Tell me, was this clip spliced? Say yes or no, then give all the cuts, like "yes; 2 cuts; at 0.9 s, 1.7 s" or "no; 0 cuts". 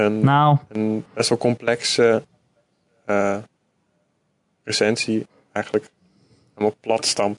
no; 0 cuts